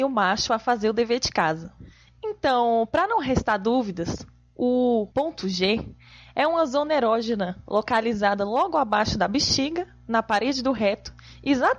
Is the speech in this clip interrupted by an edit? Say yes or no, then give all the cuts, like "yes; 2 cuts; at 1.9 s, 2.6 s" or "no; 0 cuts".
yes; 1 cut; at 5.1 s